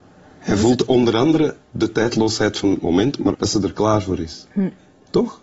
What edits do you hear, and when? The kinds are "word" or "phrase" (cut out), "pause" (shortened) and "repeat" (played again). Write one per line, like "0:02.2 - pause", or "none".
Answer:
0:01.6 - pause
0:03.3 - word